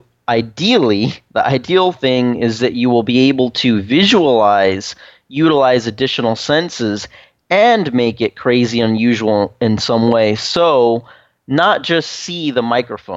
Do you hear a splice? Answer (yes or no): no